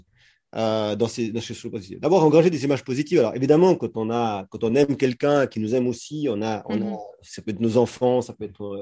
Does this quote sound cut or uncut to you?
uncut